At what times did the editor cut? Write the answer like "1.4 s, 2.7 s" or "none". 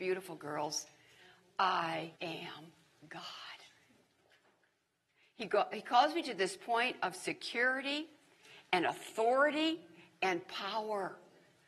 2.2 s